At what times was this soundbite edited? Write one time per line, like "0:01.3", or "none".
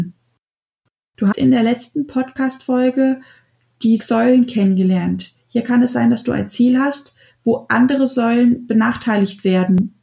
0:01.3
0:04.0